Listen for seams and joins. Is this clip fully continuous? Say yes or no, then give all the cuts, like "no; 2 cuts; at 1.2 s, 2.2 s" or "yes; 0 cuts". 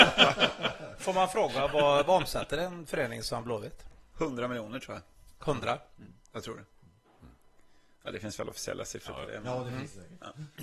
yes; 0 cuts